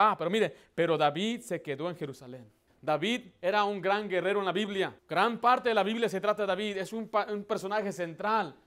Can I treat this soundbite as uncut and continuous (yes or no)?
no